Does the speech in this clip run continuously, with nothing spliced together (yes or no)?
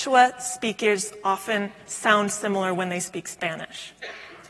yes